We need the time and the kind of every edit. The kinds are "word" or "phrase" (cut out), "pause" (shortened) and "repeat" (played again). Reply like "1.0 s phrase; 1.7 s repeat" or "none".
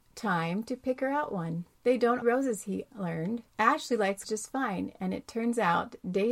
1.7 s pause; 2.2 s phrase; 3.5 s pause; 4.2 s word